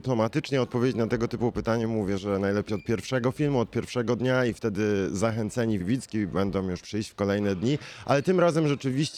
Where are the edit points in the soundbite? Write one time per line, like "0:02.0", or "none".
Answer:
0:02.7
0:05.8
0:06.8